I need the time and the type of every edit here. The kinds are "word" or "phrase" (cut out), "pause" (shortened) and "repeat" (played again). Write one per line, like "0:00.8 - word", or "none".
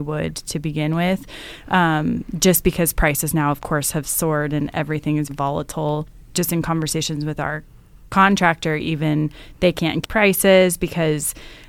0:05.3 - word
0:10.0 - word